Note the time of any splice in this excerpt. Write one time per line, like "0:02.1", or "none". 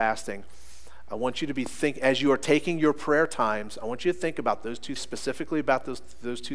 0:05.0